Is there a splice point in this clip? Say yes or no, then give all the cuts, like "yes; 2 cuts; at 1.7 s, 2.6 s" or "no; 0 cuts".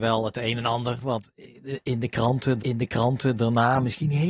yes; 1 cut; at 2.6 s